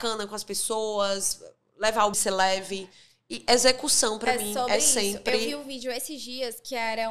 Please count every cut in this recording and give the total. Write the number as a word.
one